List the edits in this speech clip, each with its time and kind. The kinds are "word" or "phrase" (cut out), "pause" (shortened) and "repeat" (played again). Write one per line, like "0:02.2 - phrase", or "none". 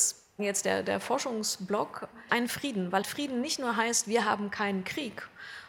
0:02.3 - word
0:03.0 - word